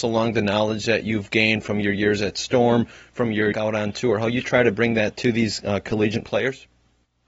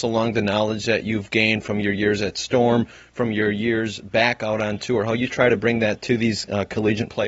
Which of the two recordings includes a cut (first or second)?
first